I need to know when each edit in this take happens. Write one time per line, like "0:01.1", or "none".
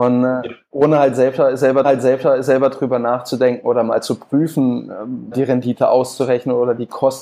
0:01.8
0:05.3